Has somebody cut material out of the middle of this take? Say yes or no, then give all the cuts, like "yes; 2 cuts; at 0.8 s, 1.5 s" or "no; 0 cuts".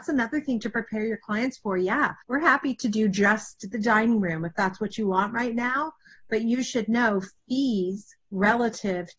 yes; 2 cuts; at 2.2 s, 8.2 s